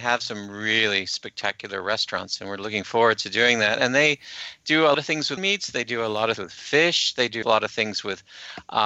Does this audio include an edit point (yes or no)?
yes